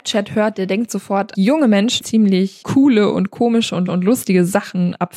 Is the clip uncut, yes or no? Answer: no